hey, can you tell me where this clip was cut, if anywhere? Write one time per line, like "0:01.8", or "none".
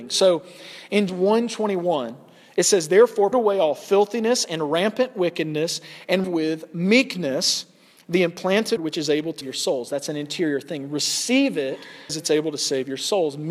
0:01.1
0:03.3
0:06.2
0:08.8
0:09.4
0:12.1